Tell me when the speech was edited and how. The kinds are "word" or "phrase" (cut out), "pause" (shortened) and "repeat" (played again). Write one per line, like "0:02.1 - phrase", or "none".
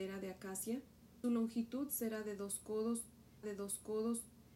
0:01.2 - word
0:03.4 - repeat